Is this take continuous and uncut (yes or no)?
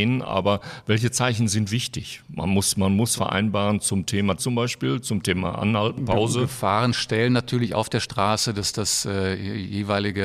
no